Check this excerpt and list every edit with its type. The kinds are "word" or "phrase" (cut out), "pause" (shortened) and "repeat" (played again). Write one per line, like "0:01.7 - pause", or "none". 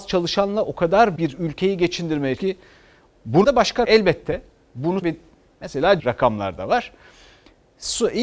0:01.2 - word
0:02.4 - word
0:03.4 - word
0:03.8 - word
0:05.0 - word
0:06.0 - word